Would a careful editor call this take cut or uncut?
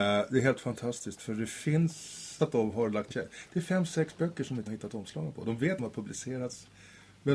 cut